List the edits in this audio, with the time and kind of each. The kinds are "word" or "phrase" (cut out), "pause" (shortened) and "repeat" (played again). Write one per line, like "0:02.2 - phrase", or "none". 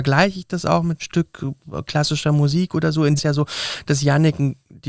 0:01.0 - word
0:03.2 - phrase